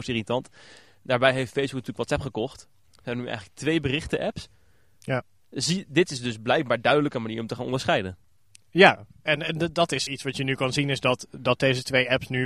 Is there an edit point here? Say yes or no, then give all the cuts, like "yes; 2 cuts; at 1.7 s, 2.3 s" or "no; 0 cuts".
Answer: yes; 1 cut; at 10.1 s